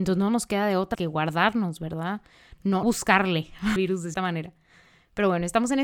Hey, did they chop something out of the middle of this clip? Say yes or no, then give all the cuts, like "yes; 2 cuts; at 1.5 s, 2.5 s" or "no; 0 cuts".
yes; 4 cuts; at 0.9 s, 2.8 s, 3.8 s, 4.1 s